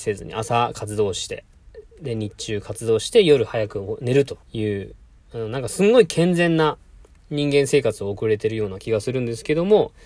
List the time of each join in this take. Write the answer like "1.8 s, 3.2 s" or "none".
4.4 s

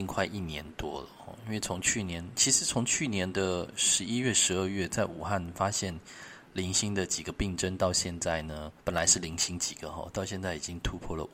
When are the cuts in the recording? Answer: 8.8 s

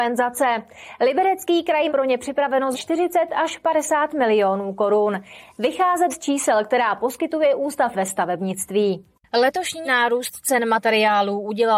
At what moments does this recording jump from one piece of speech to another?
1.9 s, 2.7 s, 6.1 s, 7.9 s, 9.8 s

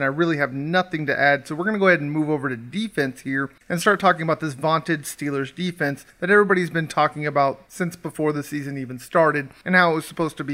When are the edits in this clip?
3.6 s, 7.7 s

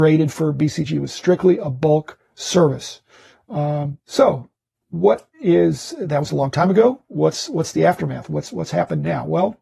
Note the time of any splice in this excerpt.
4.0 s, 5.3 s

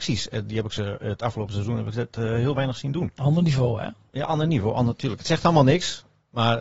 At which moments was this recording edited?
none

